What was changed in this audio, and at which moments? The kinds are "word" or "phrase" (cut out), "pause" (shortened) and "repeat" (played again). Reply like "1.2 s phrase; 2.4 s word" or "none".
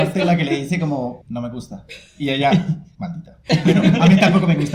1.2 s word